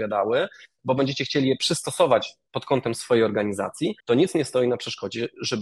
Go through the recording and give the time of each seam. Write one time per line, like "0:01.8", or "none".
0:04.0